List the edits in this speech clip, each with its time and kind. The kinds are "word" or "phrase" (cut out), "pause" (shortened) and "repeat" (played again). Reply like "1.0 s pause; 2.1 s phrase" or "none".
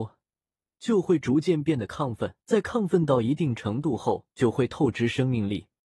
2.4 s pause; 4.3 s pause